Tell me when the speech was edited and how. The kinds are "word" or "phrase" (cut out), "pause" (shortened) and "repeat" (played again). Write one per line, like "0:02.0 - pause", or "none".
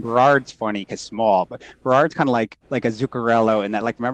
0:01.0 - word
0:02.6 - pause